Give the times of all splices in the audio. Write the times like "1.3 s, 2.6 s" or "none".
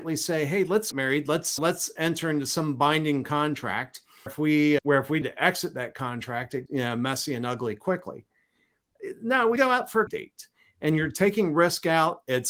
0.9 s, 1.6 s, 4.3 s, 4.8 s, 5.2 s, 6.7 s, 9.6 s, 10.1 s

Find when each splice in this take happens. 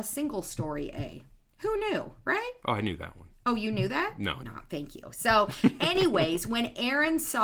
4.4 s

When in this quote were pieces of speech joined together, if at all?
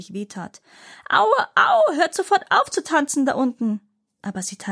none

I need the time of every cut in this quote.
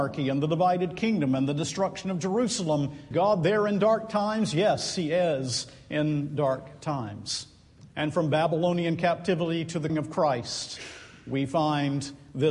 3.1 s, 7.9 s, 9.9 s

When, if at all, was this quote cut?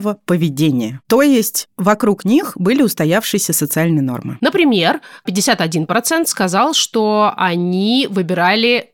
none

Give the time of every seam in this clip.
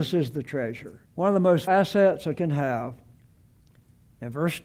1.0 s, 1.7 s, 2.4 s

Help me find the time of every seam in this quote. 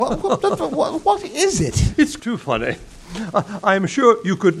2.2 s

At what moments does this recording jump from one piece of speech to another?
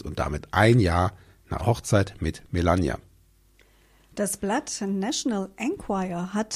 1.6 s

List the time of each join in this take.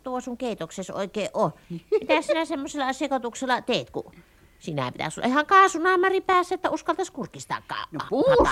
none

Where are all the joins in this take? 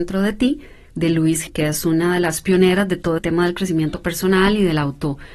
1.5 s, 3.2 s

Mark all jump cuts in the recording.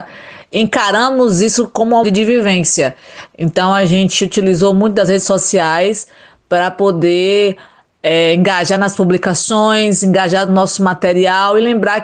2.0 s

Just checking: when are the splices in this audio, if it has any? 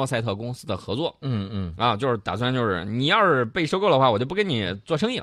none

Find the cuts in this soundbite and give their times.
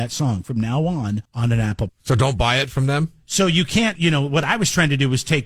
1.2 s, 1.9 s, 3.9 s

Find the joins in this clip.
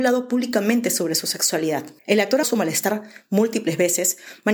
2.0 s, 2.4 s

